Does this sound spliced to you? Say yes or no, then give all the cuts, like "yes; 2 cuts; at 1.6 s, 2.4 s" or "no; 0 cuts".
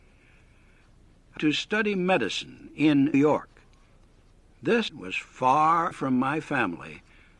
yes; 4 cuts; at 1.4 s, 3.1 s, 4.9 s, 5.9 s